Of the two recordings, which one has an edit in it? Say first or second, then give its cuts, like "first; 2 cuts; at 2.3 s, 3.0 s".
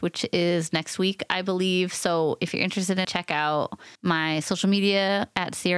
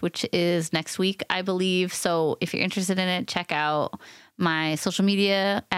first; 2 cuts; at 3.0 s, 4.0 s